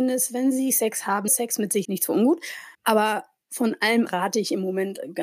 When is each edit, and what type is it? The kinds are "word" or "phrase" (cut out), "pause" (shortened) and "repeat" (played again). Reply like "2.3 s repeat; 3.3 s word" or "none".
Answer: 1.3 s word; 1.8 s word; 2.7 s pause; 4.1 s word